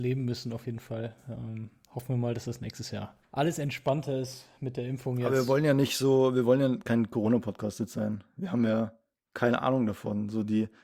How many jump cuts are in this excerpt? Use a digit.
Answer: 0